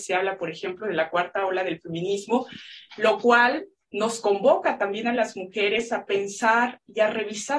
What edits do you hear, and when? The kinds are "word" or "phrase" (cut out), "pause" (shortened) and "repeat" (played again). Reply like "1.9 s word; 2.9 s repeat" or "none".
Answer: none

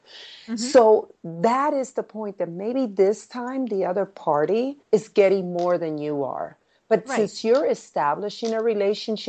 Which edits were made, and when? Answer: 4.8 s pause

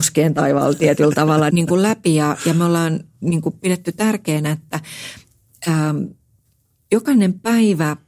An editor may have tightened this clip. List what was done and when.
1.5 s word

